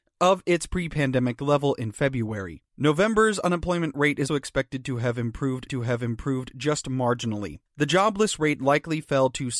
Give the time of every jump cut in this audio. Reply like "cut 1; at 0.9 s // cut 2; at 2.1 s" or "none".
cut 1; at 2.7 s // cut 2; at 4.3 s // cut 3; at 5.7 s // cut 4; at 7.7 s